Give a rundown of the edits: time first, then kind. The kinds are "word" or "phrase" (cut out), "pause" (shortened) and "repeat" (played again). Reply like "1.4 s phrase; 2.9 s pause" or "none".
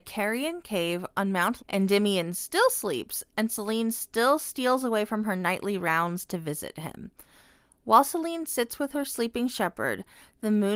1.6 s word